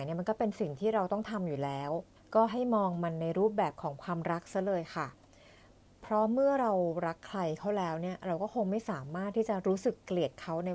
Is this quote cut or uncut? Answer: cut